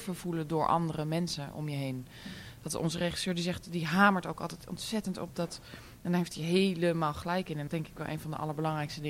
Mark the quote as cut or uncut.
cut